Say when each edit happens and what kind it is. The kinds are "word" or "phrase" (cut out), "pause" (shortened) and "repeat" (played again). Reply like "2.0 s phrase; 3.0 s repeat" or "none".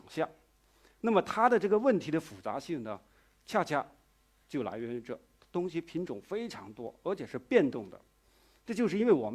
none